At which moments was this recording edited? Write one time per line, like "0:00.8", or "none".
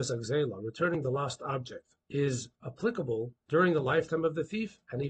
0:02.0
0:03.4